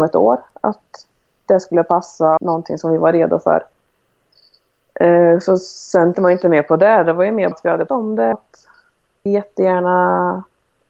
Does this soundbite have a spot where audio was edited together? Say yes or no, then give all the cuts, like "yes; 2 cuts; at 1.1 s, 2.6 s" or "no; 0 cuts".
yes; 6 cuts; at 2.4 s, 6.1 s, 7.5 s, 7.9 s, 8.3 s, 9.3 s